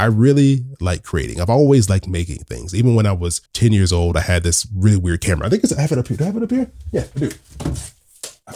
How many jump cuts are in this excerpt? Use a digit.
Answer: 1